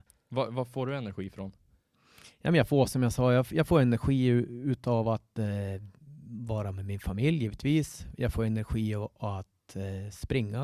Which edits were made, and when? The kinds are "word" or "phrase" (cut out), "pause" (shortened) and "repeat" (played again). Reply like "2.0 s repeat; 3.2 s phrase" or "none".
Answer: none